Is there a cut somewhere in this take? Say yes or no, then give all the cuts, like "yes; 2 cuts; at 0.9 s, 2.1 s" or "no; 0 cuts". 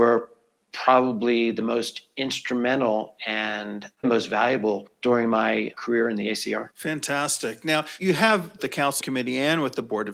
yes; 4 cuts; at 4.0 s, 6.7 s, 8.6 s, 9.0 s